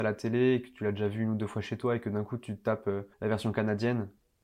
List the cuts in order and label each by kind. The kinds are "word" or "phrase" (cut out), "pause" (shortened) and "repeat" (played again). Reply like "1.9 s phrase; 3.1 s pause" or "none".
3.1 s pause